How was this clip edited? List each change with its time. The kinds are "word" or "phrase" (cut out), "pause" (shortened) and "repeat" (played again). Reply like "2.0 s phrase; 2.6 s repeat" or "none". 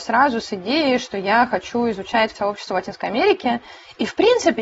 2.3 s word